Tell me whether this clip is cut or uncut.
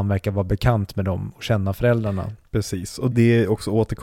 cut